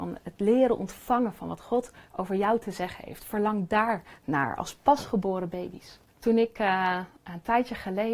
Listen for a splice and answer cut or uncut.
cut